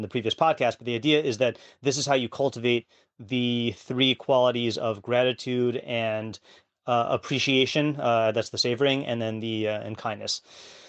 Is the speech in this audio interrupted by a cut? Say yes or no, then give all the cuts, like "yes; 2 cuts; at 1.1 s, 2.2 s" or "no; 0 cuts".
no; 0 cuts